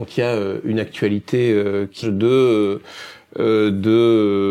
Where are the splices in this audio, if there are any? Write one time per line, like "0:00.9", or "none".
0:02.0